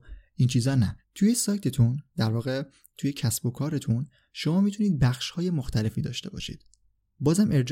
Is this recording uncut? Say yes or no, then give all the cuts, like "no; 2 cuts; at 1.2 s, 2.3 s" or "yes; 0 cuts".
no; 1 cut; at 1.0 s